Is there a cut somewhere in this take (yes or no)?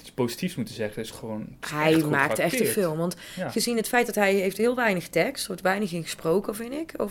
no